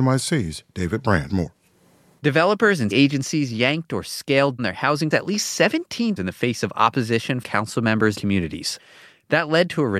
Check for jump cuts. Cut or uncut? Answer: cut